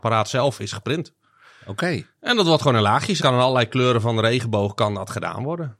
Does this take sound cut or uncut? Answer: cut